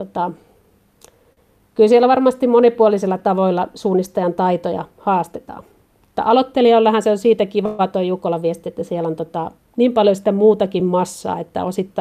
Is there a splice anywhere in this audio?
no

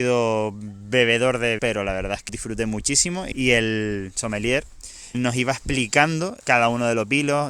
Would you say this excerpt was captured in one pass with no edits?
no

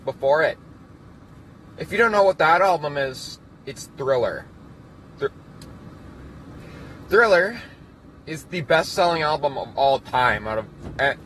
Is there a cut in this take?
no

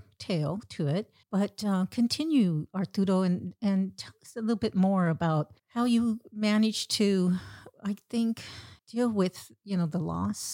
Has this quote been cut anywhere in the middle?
yes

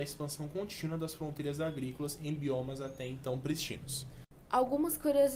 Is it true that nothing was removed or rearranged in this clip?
yes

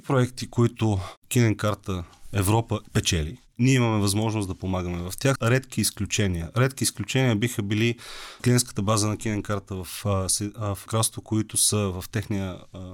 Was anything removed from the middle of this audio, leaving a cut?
yes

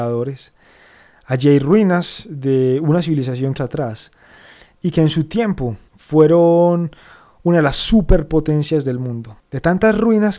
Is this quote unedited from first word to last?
no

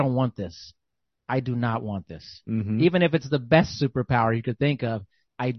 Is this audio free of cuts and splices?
yes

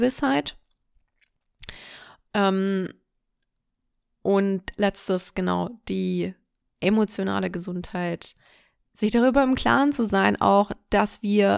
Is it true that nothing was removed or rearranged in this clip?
yes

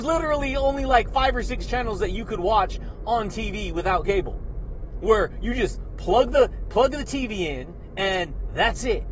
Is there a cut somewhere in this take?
no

